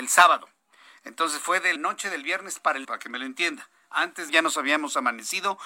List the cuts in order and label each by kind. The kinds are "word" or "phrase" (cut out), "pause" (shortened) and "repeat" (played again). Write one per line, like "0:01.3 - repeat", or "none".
0:01.8 - word
0:02.8 - word
0:04.3 - phrase